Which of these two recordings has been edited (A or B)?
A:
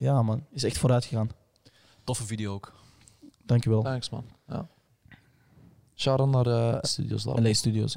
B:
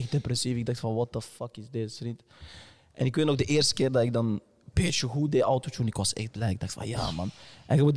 A